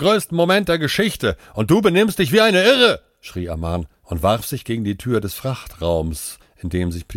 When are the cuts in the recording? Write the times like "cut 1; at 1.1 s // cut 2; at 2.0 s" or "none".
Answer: none